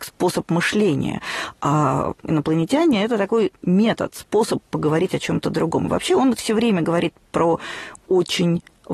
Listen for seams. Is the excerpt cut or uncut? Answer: uncut